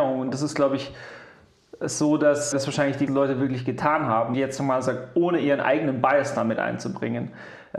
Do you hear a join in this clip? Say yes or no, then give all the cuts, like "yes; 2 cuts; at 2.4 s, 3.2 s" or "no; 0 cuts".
yes; 3 cuts; at 2.5 s, 3.1 s, 4.3 s